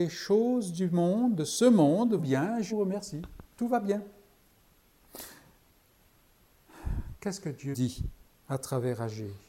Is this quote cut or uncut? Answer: cut